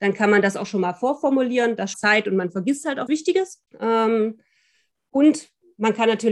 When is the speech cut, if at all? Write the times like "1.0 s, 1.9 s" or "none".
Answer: 1.9 s, 3.1 s, 3.7 s